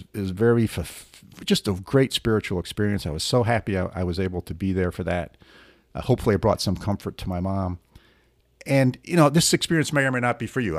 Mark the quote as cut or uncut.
uncut